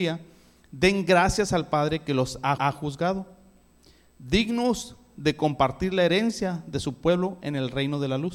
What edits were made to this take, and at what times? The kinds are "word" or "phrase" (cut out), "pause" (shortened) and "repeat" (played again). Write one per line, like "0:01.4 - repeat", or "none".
0:02.6 - repeat